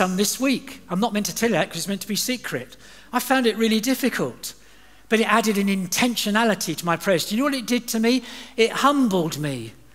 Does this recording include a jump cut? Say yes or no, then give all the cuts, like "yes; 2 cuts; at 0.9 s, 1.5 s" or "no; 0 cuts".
no; 0 cuts